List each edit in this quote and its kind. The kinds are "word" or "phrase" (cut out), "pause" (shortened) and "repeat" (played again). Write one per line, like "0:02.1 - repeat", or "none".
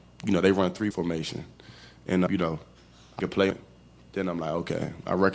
0:00.9 - phrase
0:02.3 - word
0:03.2 - word
0:03.5 - word